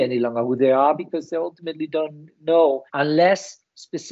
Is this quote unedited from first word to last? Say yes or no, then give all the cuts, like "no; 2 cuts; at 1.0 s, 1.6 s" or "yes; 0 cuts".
no; 1 cut; at 2.9 s